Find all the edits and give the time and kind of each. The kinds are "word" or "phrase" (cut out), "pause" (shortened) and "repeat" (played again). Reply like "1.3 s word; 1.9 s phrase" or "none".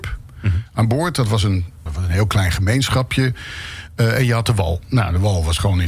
1.9 s word